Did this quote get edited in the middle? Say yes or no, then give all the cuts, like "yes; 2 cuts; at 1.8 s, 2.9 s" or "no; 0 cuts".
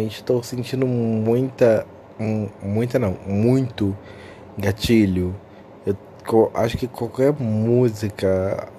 no; 0 cuts